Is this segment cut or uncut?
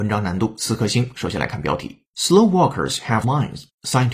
cut